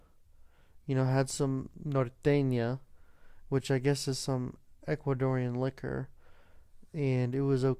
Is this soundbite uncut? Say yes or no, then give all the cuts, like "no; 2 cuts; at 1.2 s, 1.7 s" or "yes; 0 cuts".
yes; 0 cuts